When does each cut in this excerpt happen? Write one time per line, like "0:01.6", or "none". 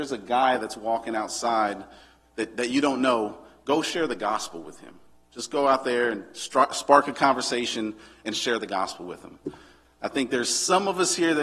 none